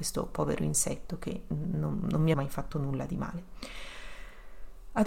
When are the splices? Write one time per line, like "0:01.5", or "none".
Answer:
0:02.3

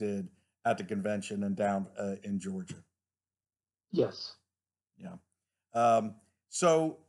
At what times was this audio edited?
none

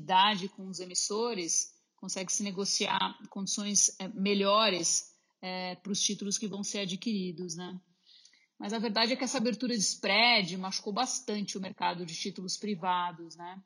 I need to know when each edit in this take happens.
none

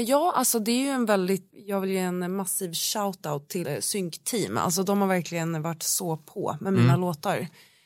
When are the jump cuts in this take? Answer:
0:01.5
0:03.6

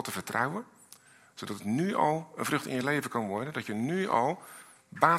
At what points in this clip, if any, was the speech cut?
none

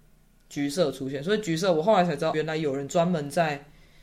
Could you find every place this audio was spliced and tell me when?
0:02.3

